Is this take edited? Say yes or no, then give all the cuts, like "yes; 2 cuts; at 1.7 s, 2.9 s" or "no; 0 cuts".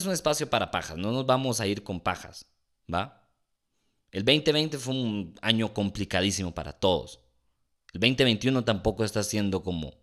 no; 0 cuts